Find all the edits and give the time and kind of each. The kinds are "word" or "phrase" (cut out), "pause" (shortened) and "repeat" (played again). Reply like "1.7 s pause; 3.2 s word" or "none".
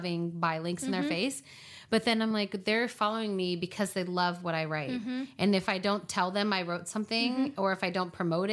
none